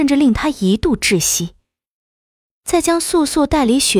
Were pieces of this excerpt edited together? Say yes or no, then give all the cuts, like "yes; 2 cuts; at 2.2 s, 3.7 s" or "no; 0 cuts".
no; 0 cuts